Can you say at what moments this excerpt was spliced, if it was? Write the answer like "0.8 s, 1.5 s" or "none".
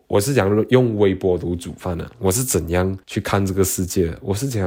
3.0 s